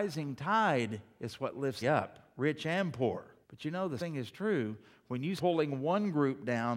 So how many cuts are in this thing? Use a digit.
4